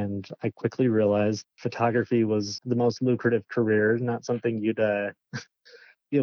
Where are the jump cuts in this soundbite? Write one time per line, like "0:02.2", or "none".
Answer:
0:01.4
0:02.6